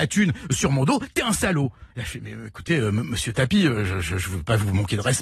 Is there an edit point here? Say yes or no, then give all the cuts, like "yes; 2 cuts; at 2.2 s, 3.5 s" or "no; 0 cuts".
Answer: yes; 1 cut; at 1.9 s